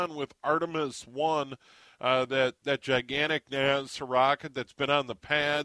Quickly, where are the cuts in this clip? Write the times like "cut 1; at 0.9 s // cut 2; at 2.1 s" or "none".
none